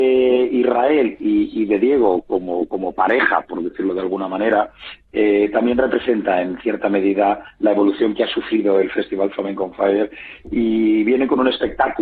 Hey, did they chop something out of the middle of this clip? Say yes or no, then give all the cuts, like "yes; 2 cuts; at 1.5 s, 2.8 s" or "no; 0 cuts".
no; 0 cuts